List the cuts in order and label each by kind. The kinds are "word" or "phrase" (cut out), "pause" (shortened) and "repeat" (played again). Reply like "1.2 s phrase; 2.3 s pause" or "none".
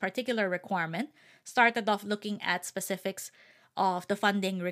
none